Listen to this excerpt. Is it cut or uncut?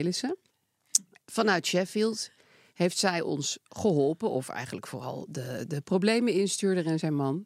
uncut